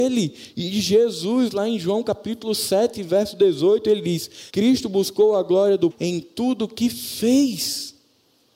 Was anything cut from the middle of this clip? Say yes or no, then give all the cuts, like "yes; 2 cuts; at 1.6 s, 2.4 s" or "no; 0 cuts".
yes; 2 cuts; at 4.5 s, 5.9 s